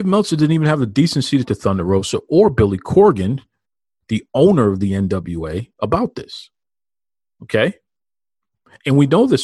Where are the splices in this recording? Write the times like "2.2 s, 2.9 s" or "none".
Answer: 1.4 s